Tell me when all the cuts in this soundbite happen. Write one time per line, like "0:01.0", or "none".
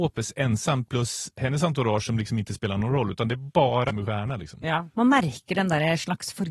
0:03.9
0:04.9